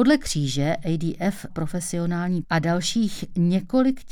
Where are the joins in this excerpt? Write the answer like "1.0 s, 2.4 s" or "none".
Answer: 1.5 s, 2.4 s